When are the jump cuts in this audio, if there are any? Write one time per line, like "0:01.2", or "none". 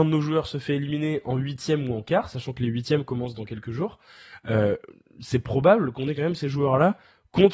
none